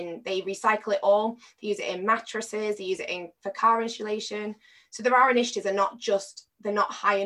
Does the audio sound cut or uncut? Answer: uncut